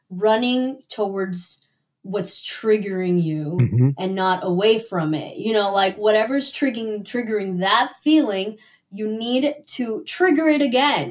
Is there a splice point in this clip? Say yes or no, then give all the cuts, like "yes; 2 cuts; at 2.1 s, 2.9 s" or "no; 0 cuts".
no; 0 cuts